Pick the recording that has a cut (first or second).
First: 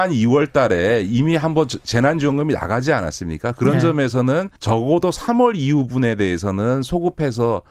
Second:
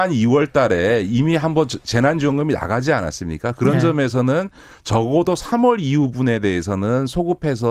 first